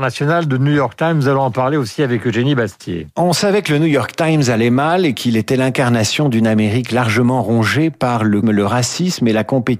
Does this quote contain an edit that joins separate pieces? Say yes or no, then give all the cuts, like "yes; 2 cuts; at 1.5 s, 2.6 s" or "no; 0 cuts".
yes; 1 cut; at 8.4 s